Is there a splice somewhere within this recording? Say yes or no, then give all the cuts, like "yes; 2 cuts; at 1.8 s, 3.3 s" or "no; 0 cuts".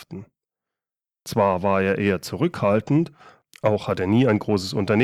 no; 0 cuts